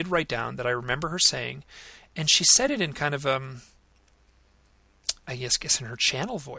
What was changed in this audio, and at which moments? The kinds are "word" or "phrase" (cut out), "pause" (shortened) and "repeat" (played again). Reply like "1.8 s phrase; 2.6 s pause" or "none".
none